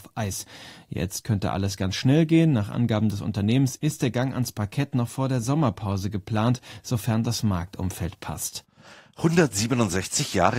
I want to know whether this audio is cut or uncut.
uncut